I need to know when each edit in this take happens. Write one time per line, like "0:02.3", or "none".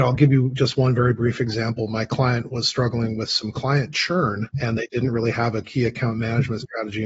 0:04.5